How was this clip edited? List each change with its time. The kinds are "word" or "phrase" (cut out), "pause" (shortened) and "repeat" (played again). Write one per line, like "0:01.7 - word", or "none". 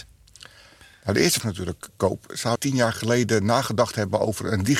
0:01.4 - word
0:02.5 - word